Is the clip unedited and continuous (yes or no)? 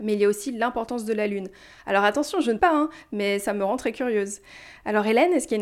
no